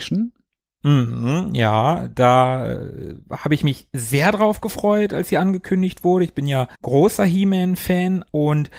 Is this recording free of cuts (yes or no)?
no